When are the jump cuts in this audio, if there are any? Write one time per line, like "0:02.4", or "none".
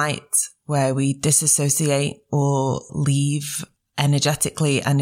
none

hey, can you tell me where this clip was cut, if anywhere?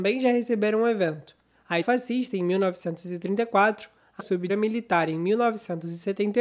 0:01.8
0:04.2
0:04.5

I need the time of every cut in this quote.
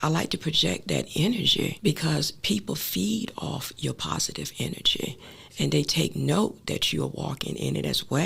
none

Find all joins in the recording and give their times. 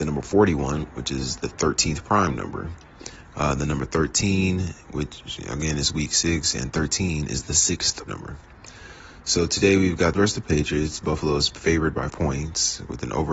0:08.1
0:10.1
0:12.1

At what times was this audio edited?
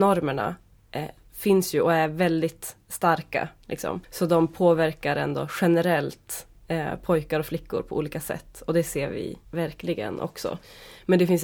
0:04.0
0:09.5

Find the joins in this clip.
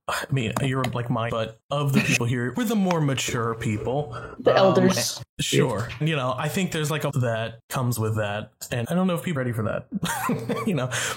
0:01.3
0:02.5
0:06.0
0:07.1
0:08.8
0:09.4

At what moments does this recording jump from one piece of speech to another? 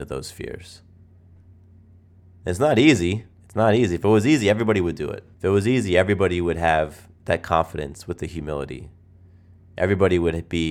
0:03.3
0:05.3
0:07.2

